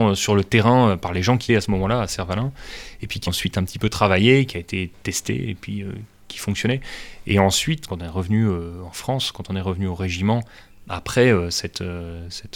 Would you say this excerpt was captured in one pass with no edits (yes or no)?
no